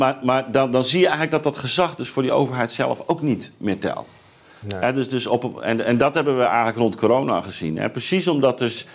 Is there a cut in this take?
no; 0 cuts

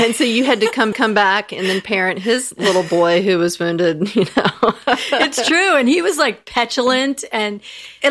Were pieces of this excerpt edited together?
yes; 1 cut; at 0.9 s

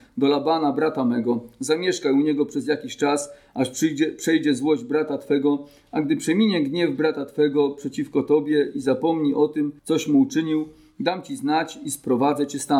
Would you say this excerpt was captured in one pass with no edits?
no; 1 cut; at 9.8 s

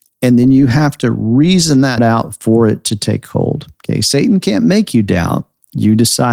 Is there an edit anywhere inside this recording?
yes; 1 cut; at 2.0 s

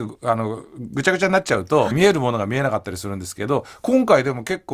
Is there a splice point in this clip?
yes; 1 cut; at 1.9 s

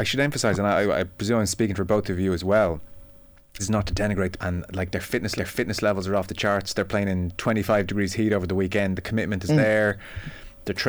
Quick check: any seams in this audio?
yes; 3 cuts; at 3.6 s, 4.4 s, 5.4 s

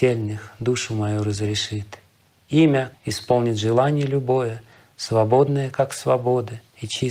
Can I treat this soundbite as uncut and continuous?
no; 1 cut; at 2.9 s

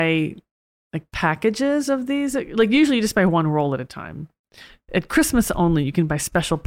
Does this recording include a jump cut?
no; 0 cuts

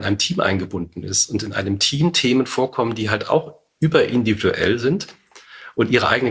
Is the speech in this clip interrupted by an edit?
no; 0 cuts

